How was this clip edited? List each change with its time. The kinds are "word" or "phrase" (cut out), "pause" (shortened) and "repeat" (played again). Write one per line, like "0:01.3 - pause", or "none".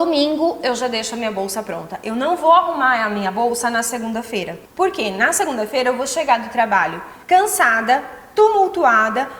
0:04.7 - pause
0:07.2 - pause